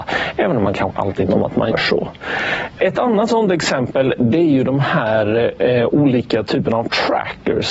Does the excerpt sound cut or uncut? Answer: cut